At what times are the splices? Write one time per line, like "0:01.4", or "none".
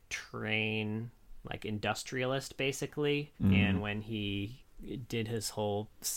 0:03.4